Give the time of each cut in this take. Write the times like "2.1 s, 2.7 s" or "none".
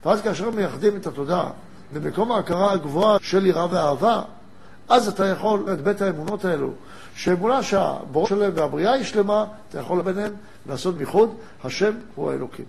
3.2 s, 5.7 s, 8.3 s, 10.0 s, 11.0 s